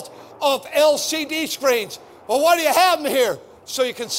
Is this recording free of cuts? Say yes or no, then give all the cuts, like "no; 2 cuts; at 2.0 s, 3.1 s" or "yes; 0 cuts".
yes; 0 cuts